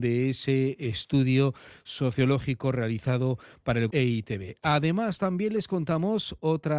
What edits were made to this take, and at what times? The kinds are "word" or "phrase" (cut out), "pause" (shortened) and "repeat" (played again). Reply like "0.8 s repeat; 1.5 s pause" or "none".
3.9 s word